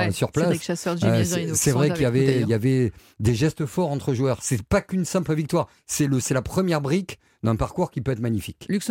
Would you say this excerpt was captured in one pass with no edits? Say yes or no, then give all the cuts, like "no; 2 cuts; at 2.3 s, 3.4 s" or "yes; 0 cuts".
no; 1 cut; at 6.2 s